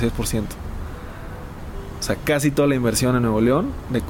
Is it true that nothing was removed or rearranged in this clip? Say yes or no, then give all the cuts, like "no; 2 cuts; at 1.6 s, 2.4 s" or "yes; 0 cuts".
yes; 0 cuts